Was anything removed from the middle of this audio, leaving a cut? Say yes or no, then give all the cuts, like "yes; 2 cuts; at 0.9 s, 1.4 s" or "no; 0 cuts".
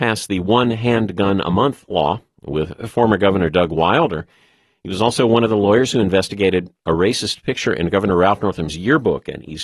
no; 0 cuts